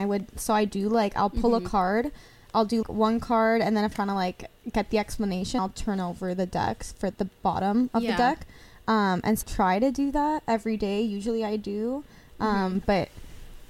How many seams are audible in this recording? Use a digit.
5